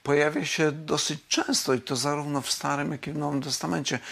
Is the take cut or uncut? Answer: uncut